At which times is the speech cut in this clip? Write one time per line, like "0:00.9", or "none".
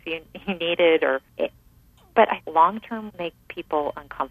0:01.3
0:02.4
0:03.1

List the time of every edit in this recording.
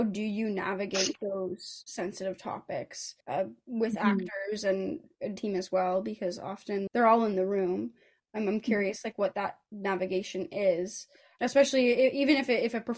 0:03.2
0:05.4
0:06.9

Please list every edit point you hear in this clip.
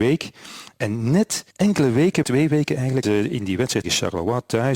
0:01.5
0:02.2
0:03.0
0:03.8

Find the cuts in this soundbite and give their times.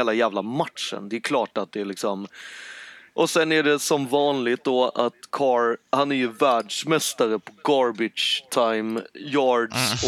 none

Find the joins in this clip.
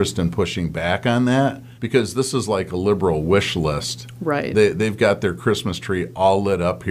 0:01.8

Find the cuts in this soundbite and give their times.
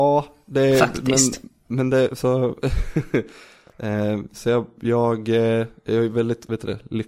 none

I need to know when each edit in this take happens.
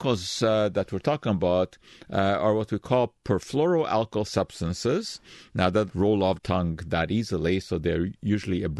0:05.9
0:06.4

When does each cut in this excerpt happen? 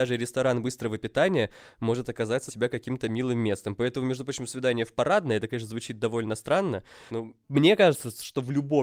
0:02.5
0:07.1
0:07.4

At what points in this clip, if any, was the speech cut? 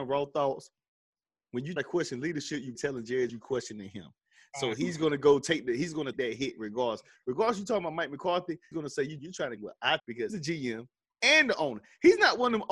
0:01.8
0:02.8
0:03.3
0:06.1
0:08.7
0:09.2
0:09.6
0:10.0
0:10.3

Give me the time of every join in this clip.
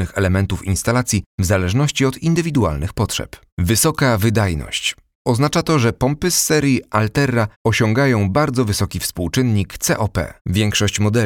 0:01.3
0:03.5
0:07.5
0:10.4

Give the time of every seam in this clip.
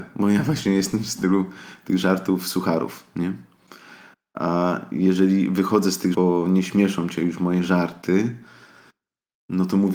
0:06.1

